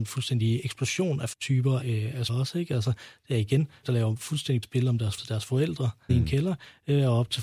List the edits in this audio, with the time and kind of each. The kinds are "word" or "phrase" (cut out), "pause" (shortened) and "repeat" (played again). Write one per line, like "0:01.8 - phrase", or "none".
0:01.3 - word
0:01.8 - word
0:02.3 - word
0:03.8 - word
0:04.6 - word
0:05.2 - word
0:06.1 - word